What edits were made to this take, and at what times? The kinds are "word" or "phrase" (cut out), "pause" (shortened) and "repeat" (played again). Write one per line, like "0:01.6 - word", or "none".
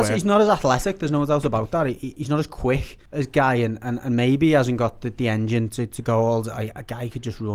0:03.1 - pause

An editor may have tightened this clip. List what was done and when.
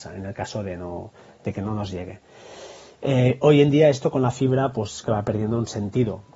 0:05.0 - word

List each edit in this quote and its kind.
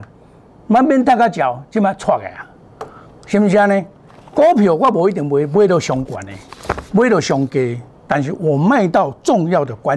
none

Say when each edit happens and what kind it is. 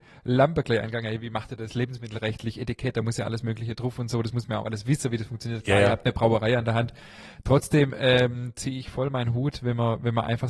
none

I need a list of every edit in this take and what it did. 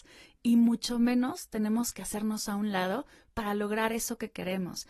none

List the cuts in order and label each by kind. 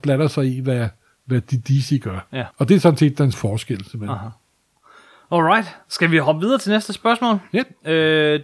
0:02.5 - pause
0:03.3 - word

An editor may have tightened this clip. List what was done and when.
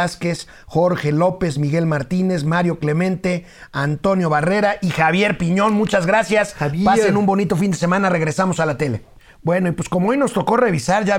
none

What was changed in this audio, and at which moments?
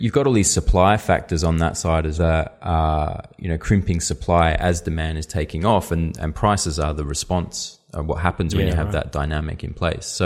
0:02.1 - word

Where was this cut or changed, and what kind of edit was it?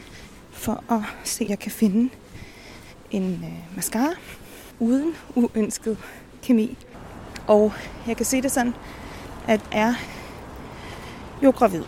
0:01.5 - word
0:06.4 - pause
0:09.7 - word

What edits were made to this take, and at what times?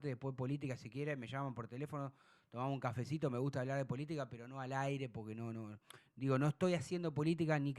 none

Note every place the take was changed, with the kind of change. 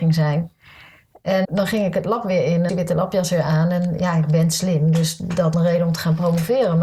0:01.4 - word
0:02.7 - phrase
0:05.5 - phrase

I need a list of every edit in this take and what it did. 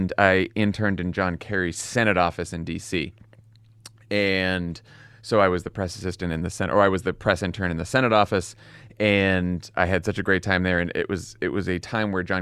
none

